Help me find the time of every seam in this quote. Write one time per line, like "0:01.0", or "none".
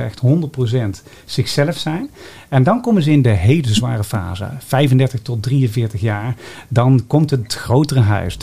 none